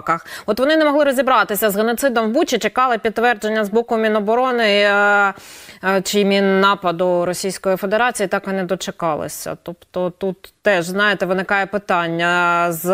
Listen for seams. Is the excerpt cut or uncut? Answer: uncut